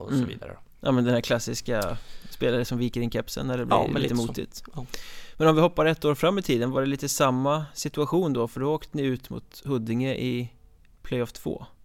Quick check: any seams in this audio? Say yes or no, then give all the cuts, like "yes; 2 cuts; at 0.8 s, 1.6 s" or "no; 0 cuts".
no; 0 cuts